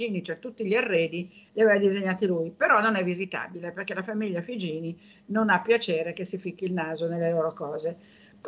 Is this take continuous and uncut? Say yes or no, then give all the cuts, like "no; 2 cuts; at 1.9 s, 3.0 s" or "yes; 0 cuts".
yes; 0 cuts